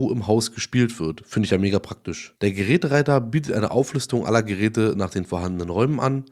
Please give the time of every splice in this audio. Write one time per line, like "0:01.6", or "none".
none

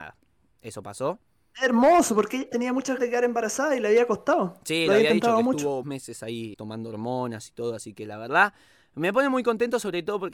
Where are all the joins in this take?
0:02.5
0:03.0
0:05.8
0:06.5

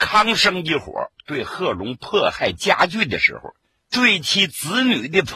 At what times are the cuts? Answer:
none

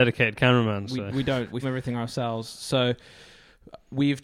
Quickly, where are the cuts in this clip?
0:01.6

